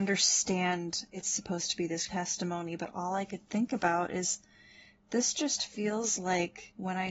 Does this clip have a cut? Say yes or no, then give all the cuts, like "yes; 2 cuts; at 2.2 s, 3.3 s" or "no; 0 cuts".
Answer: yes; 1 cut; at 2.1 s